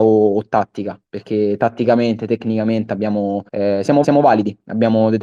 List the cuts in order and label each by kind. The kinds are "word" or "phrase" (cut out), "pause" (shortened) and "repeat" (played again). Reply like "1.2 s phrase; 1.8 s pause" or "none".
3.5 s pause; 4.0 s repeat